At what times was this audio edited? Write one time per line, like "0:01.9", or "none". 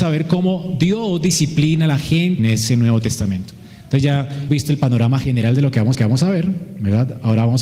0:02.4
0:04.5
0:05.9